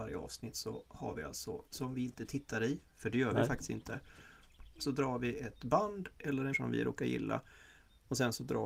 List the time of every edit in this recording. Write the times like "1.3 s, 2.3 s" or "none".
1.7 s, 6.5 s